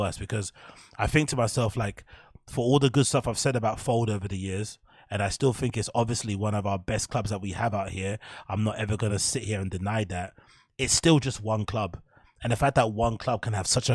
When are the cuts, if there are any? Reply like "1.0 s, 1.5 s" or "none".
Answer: none